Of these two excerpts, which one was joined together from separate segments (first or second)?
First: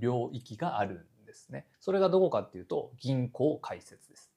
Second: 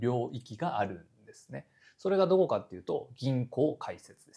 first